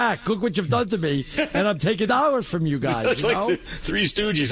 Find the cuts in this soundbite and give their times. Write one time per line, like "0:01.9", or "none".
0:02.1